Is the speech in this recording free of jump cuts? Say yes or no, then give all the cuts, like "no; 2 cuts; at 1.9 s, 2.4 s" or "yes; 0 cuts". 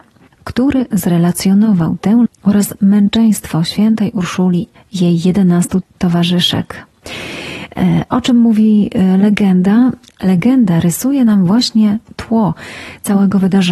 no; 3 cuts; at 2.3 s, 4.8 s, 5.8 s